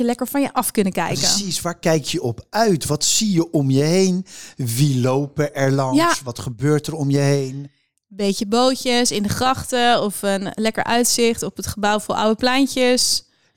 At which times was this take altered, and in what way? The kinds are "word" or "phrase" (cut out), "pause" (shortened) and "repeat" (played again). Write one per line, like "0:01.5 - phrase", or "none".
none